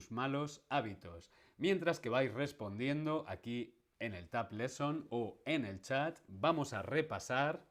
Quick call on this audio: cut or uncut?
uncut